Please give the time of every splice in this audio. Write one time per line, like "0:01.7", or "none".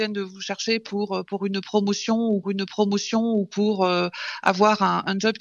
0:02.4